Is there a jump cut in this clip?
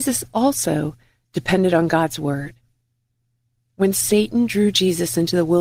no; 0 cuts

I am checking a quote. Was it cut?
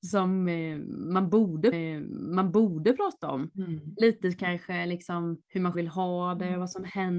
yes; 3 cuts; at 1.7 s, 5.4 s, 5.7 s

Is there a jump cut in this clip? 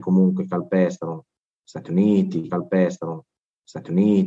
yes; 1 cut; at 2.5 s

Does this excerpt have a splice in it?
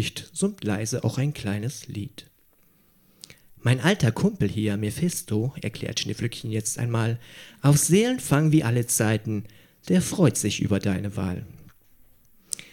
no; 0 cuts

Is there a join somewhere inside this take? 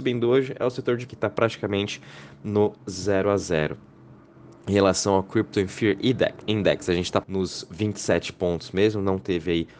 yes; 2 cuts; at 1.1 s, 7.2 s

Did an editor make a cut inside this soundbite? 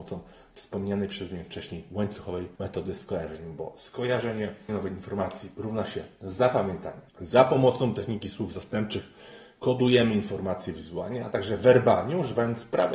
yes; 3 cuts; at 2.6 s, 4.7 s, 7.1 s

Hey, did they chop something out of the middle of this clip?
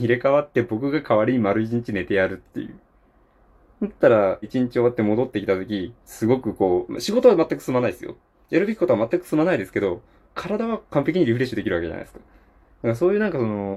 yes; 2 cuts; at 4.4 s, 6.0 s

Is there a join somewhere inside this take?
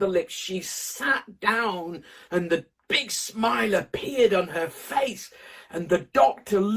no; 0 cuts

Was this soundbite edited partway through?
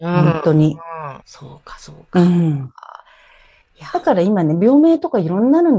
yes; 1 cut; at 1.2 s

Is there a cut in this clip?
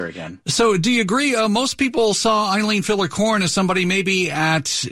no; 0 cuts

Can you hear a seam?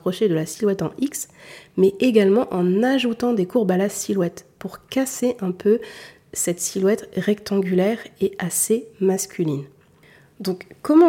no; 0 cuts

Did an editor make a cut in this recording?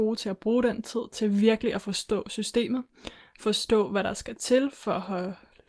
no; 0 cuts

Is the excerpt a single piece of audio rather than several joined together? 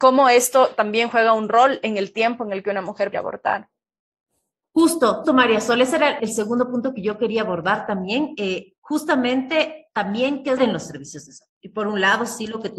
no; 4 cuts; at 3.1 s, 5.2 s, 6.2 s, 10.6 s

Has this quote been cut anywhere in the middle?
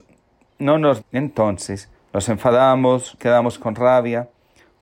yes; 3 cuts; at 1.0 s, 2.0 s, 3.2 s

